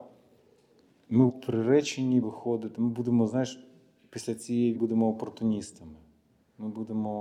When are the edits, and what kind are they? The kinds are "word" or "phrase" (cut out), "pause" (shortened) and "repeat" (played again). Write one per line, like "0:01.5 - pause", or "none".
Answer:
0:01.3 - word
0:02.2 - word
0:04.7 - word